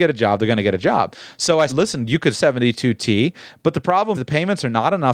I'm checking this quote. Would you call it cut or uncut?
cut